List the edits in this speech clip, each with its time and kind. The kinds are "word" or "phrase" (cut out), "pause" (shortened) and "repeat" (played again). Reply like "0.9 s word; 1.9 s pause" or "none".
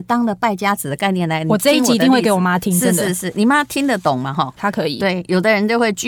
4.6 s phrase